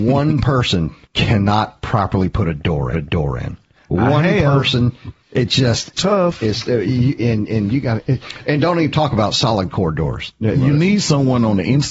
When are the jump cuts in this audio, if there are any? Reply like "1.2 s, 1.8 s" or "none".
1.0 s, 2.9 s, 5.2 s, 5.9 s